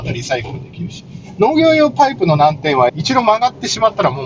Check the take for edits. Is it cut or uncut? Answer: cut